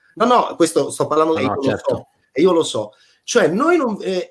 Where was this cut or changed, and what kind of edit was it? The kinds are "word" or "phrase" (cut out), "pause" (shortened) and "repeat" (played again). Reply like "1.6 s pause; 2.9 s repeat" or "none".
1.3 s phrase